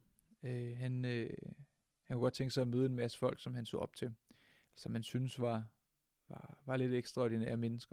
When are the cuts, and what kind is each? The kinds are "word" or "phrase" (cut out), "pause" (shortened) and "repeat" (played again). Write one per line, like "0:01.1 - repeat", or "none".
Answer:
none